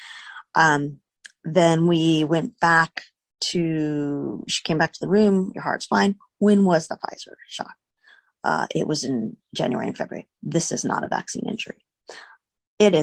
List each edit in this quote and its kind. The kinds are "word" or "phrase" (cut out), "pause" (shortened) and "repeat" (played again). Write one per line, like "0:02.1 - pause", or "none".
0:10.3 - pause